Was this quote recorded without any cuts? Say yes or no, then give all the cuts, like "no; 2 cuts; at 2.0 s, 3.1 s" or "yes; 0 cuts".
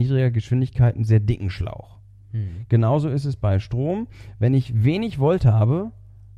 yes; 0 cuts